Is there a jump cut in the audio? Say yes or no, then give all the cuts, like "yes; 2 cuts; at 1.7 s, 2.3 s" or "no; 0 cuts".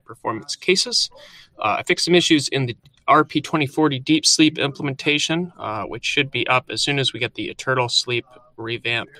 no; 0 cuts